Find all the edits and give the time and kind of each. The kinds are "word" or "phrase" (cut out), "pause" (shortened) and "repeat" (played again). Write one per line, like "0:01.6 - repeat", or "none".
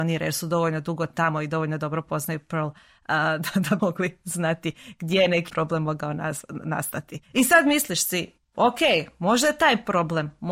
0:03.8 - word
0:05.5 - word
0:07.2 - pause